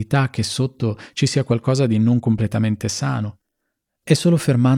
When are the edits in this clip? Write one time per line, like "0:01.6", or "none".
none